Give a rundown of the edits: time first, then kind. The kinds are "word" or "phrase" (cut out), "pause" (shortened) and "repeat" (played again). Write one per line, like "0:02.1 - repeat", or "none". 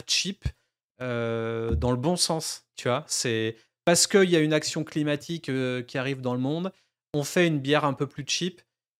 none